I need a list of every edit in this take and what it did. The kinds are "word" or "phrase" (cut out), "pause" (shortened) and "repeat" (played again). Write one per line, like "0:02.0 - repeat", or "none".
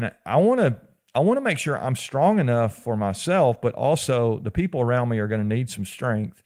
none